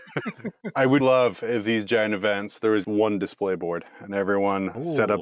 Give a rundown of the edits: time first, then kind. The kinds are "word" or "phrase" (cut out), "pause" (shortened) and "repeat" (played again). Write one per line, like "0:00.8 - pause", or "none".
0:01.0 - word
0:02.8 - word